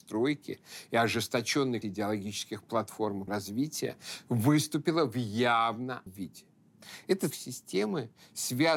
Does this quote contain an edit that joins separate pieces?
yes; 4 cuts; at 1.8 s, 3.3 s, 6.1 s, 7.3 s

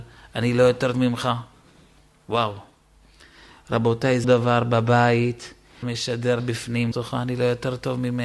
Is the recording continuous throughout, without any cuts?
no; 5 cuts; at 0.9 s, 4.2 s, 5.8 s, 6.4 s, 6.9 s

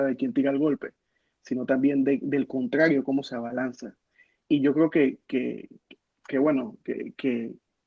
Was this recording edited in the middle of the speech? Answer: no; 0 cuts

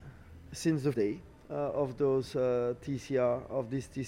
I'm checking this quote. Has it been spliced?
yes; 1 cut; at 0.9 s

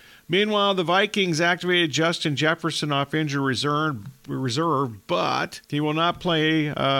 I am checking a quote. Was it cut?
yes; 1 cut; at 5.6 s

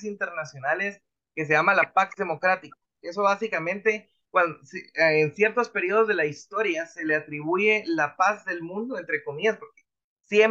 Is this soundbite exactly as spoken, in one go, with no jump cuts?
yes; 0 cuts

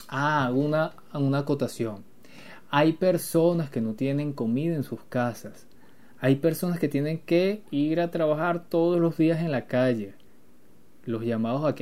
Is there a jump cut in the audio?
no; 0 cuts

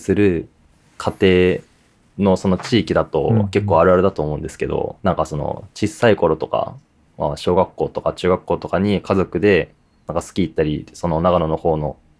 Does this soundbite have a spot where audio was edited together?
yes; 1 cut; at 5.0 s

